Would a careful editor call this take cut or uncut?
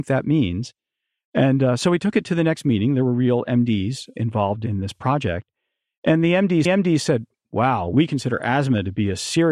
cut